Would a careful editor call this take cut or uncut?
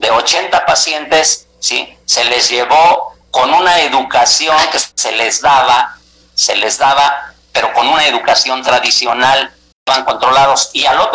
cut